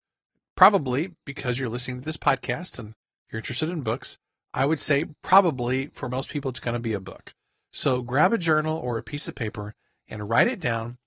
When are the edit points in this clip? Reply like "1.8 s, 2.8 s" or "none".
none